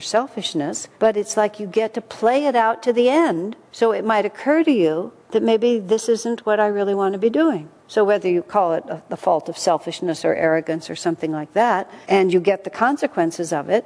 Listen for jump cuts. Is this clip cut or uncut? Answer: cut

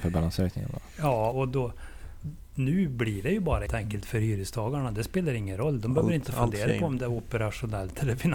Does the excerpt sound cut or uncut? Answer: cut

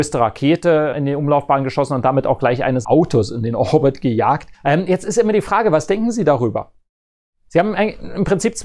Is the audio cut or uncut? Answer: cut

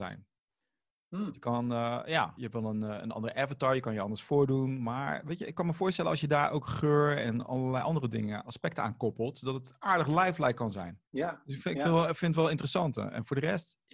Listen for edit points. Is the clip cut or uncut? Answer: cut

